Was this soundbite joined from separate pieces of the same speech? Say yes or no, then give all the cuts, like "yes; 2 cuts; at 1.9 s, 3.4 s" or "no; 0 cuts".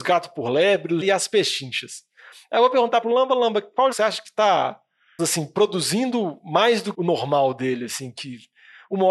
yes; 5 cuts; at 1.0 s, 3.0 s, 3.9 s, 5.2 s, 6.9 s